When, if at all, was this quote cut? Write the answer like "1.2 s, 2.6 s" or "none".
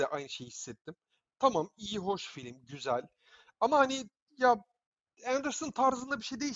none